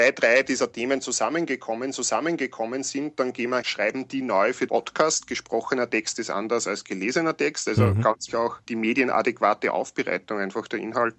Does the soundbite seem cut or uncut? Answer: cut